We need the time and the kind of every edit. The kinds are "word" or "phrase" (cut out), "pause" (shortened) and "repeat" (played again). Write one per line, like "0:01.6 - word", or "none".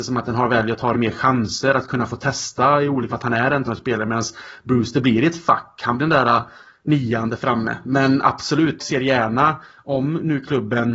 0:00.9 - word
0:03.1 - word
0:03.6 - word
0:06.0 - word
0:08.8 - word